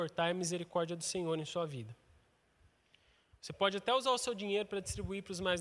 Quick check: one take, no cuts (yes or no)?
yes